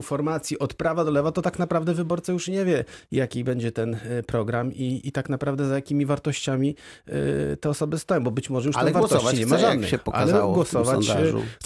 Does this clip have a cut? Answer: no; 0 cuts

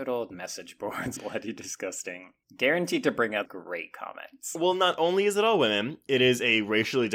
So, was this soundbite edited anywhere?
yes; 3 cuts; at 1.2 s, 2.4 s, 3.5 s

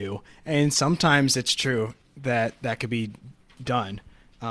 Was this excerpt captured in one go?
yes; 0 cuts

